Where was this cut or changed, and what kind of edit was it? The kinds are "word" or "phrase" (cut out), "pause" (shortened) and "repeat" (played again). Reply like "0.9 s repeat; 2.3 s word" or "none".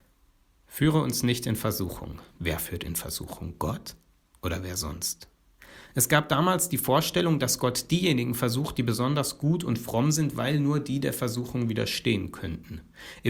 2.3 s pause